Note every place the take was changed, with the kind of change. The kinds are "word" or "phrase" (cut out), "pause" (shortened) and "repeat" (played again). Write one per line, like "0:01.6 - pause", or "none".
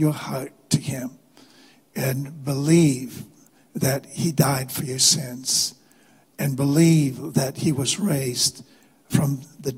none